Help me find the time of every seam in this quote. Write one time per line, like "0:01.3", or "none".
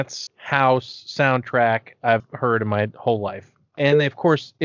0:02.2